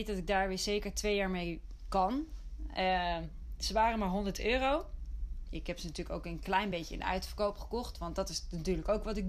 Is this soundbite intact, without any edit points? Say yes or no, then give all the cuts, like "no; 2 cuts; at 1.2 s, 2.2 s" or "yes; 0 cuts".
yes; 0 cuts